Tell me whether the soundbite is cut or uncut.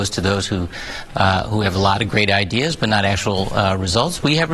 uncut